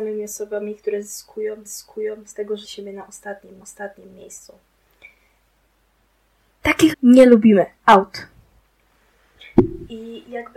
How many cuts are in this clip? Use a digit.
5